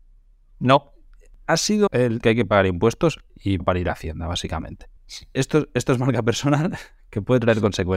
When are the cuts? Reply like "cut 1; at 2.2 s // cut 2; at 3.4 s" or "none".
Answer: cut 1; at 1.9 s // cut 2; at 2.2 s // cut 3; at 3.6 s // cut 4; at 5.0 s